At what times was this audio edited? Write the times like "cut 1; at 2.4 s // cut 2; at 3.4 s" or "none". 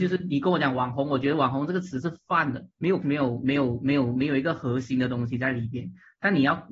cut 1; at 2.7 s // cut 2; at 3.0 s